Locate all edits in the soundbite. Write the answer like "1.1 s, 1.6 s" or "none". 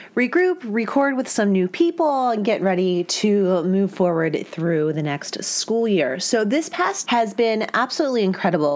7.1 s